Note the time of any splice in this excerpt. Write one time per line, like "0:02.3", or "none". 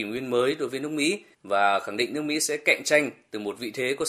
0:01.3

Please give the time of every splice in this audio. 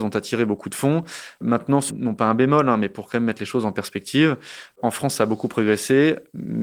0:01.9

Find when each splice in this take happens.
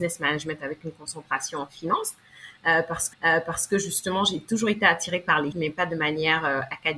0:03.1
0:05.5

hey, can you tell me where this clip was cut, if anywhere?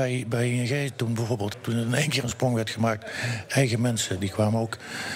0:01.5

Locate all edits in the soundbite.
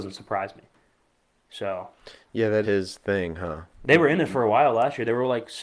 0:02.6

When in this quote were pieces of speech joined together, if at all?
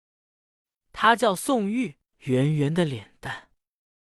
0:02.1

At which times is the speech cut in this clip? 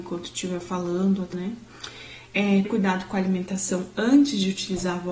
0:01.3
0:02.6

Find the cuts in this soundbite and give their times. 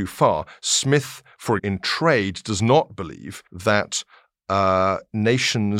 0:01.6
0:03.5

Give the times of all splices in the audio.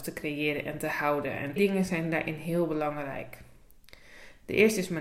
0:01.6

